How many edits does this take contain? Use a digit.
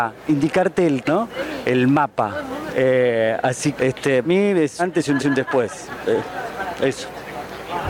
5